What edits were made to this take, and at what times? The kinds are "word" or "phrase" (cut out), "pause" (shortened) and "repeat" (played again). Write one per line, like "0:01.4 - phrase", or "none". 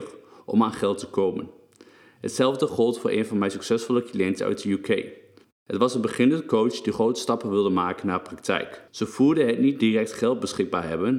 0:05.4 - pause
0:08.9 - pause